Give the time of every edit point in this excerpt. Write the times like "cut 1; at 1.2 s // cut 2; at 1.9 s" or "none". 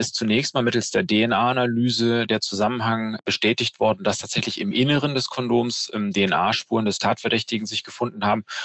none

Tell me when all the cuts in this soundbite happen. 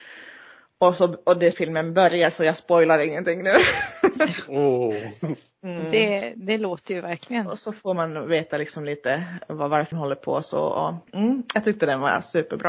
cut 1; at 1.5 s // cut 2; at 9.9 s // cut 3; at 11.1 s

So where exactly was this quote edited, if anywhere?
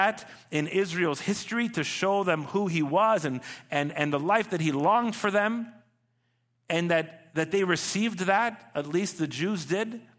none

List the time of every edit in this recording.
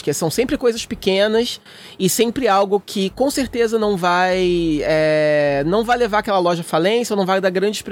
none

